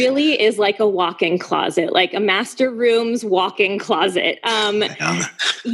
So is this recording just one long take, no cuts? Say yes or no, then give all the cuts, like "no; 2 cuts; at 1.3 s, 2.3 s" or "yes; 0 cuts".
yes; 0 cuts